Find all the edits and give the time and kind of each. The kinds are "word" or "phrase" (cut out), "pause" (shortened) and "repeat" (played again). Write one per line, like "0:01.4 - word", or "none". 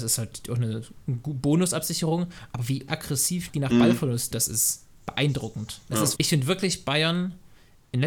0:01.0 - word
0:02.9 - word
0:03.5 - word
0:04.3 - word
0:06.1 - word